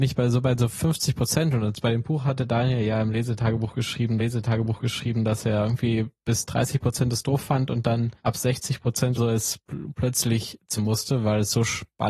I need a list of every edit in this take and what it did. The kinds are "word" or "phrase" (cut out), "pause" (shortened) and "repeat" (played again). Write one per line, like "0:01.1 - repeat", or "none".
0:04.2 - repeat
0:08.2 - pause
0:09.2 - word
0:10.8 - phrase